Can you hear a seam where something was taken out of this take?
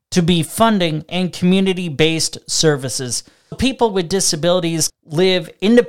yes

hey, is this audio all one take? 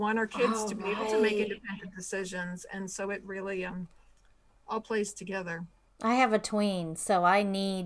yes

